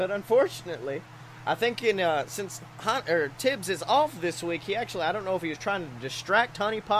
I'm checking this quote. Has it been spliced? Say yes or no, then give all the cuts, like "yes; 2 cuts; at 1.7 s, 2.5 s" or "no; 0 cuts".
no; 0 cuts